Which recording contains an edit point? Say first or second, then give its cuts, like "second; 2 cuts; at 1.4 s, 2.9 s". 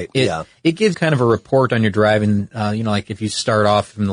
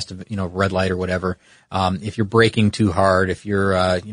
first; 1 cut; at 0.9 s